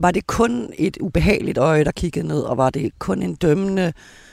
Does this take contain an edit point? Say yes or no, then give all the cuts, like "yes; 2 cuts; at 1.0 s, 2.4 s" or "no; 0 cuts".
no; 0 cuts